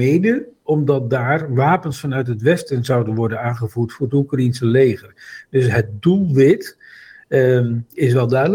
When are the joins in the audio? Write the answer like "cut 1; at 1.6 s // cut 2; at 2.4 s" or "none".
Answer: none

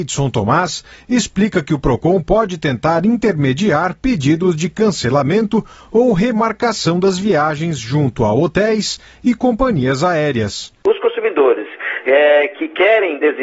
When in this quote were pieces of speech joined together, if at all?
none

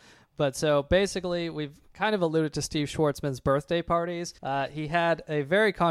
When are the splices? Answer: cut 1; at 4.4 s

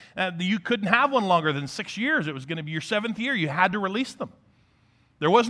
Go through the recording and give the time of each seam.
none

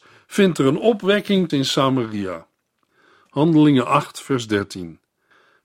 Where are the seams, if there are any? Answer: cut 1; at 1.5 s

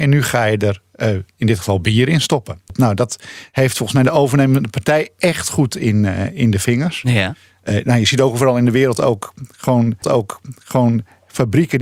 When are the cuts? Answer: cut 1; at 10.0 s

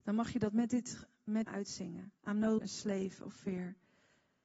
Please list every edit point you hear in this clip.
cut 1; at 1.5 s // cut 2; at 2.2 s // cut 3; at 2.6 s

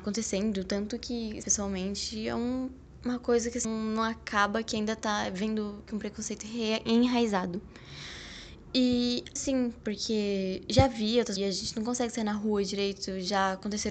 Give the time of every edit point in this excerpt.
cut 1; at 1.4 s // cut 2; at 3.6 s // cut 3; at 5.9 s // cut 4; at 9.4 s // cut 5; at 11.4 s

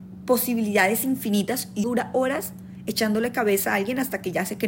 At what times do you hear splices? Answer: cut 1; at 1.8 s

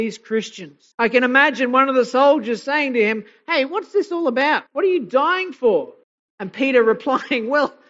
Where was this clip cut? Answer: cut 1; at 0.9 s // cut 2; at 4.7 s // cut 3; at 6.0 s

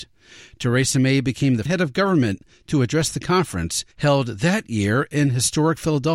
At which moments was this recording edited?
cut 1; at 1.7 s // cut 2; at 3.9 s

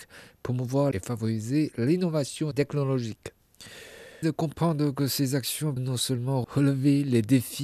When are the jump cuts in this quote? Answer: cut 1; at 0.9 s // cut 2; at 2.5 s // cut 3; at 4.2 s // cut 4; at 5.8 s

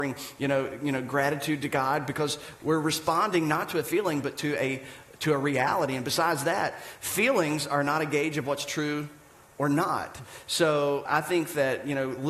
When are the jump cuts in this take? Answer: cut 1; at 11.1 s

